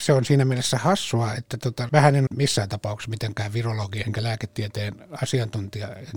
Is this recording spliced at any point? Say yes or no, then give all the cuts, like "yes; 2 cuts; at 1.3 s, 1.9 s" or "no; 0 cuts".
yes; 3 cuts; at 1.9 s, 2.3 s, 4.0 s